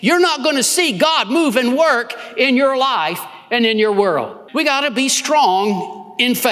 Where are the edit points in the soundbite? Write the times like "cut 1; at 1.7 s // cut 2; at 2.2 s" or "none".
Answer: cut 1; at 4.5 s